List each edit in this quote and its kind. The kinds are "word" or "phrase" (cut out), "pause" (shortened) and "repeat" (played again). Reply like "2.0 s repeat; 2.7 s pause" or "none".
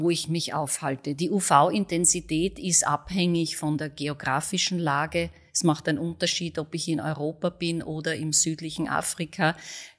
none